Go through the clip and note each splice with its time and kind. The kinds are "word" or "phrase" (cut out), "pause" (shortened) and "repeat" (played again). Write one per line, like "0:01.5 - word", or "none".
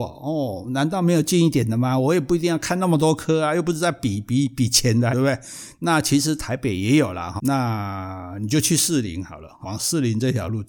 0:05.1 - phrase
0:07.4 - word
0:09.6 - word